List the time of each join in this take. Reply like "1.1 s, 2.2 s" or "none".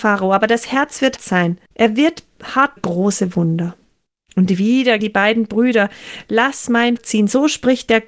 1.2 s, 1.7 s, 2.8 s, 4.1 s, 5.0 s, 7.0 s